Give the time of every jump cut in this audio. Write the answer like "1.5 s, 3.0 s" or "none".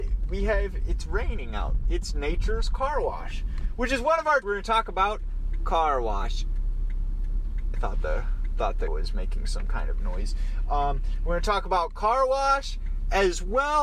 4.4 s, 7.7 s, 8.9 s